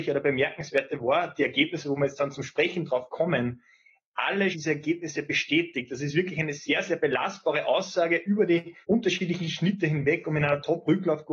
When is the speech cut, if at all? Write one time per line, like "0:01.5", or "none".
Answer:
0:04.5
0:08.8